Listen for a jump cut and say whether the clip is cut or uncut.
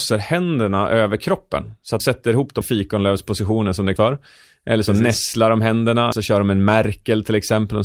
cut